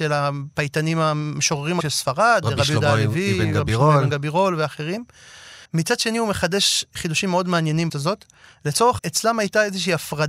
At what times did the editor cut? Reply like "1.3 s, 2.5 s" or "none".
1.8 s, 5.6 s, 7.9 s, 9.0 s